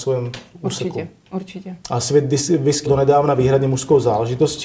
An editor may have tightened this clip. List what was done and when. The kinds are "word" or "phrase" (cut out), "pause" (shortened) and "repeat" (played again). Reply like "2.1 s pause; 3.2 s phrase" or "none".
1.8 s pause; 2.9 s word

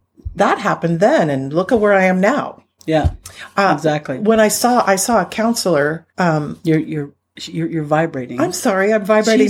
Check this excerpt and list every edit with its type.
6.1 s pause

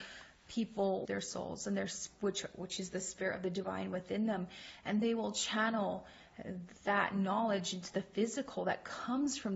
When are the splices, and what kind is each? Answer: 1.1 s phrase

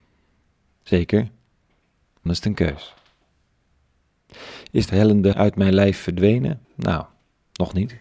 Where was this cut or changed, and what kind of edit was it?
2.3 s word; 4.9 s word; 5.3 s word; 6.6 s pause

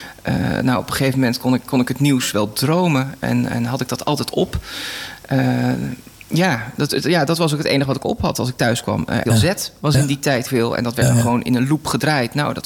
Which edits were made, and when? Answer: 6.2 s pause; 6.9 s word; 9.3 s word; 10.5 s word

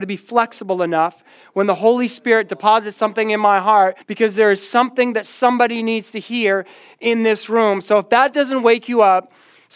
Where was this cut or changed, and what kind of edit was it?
4.0 s pause

